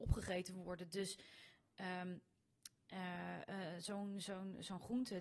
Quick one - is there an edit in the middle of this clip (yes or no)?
no